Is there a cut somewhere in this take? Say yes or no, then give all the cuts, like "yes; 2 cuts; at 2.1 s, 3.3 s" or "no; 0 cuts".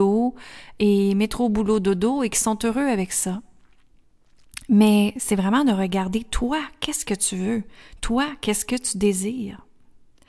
no; 0 cuts